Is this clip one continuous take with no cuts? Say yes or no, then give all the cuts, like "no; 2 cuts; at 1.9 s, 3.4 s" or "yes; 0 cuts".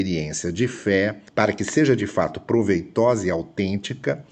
no; 1 cut; at 1.3 s